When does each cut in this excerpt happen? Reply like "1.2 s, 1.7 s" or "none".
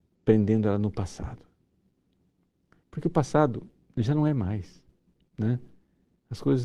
none